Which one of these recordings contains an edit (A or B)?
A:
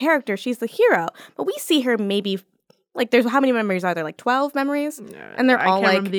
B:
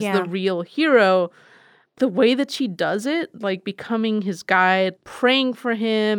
B